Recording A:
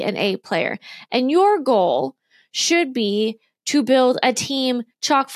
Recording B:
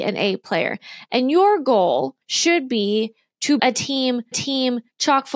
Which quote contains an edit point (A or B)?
B